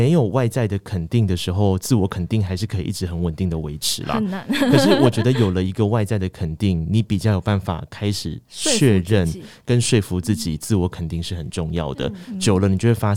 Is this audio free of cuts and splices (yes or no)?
no